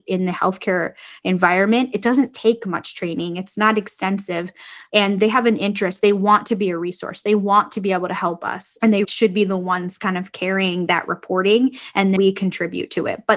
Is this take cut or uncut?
cut